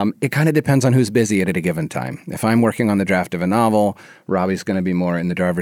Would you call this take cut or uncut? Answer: uncut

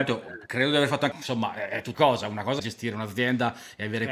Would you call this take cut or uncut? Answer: cut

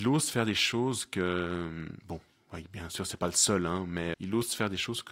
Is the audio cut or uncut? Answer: cut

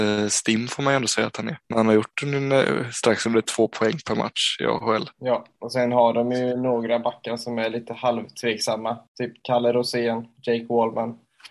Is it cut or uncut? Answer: cut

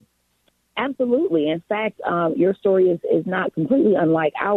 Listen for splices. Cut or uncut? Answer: uncut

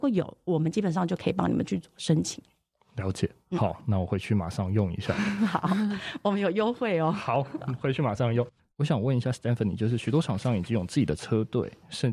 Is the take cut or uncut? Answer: uncut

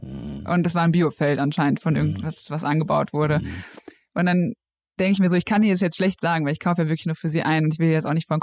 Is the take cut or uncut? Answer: uncut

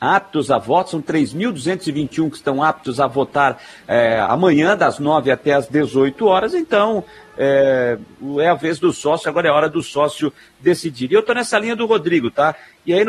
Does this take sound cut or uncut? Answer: uncut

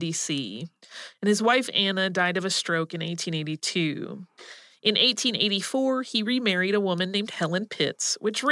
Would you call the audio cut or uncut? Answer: uncut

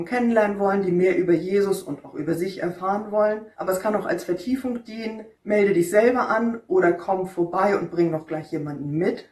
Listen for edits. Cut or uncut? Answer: cut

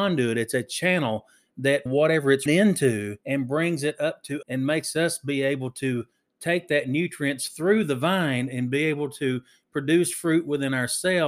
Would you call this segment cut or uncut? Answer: cut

